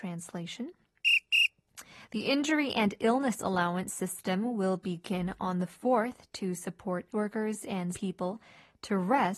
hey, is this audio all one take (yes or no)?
no